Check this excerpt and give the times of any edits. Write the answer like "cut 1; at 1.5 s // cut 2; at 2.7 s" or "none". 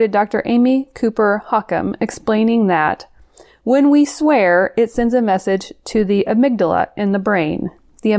none